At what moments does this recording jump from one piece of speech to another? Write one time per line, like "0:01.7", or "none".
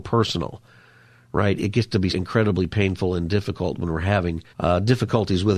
0:02.1
0:04.5